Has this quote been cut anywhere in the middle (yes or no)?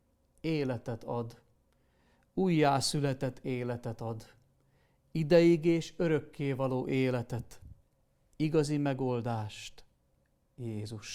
no